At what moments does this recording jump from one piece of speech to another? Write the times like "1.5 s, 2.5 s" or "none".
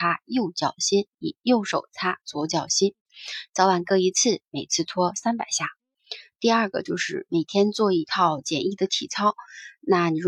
1.1 s